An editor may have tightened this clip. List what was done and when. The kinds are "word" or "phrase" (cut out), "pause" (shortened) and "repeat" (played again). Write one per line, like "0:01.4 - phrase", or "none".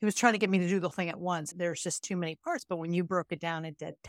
0:00.9 - word
0:01.5 - word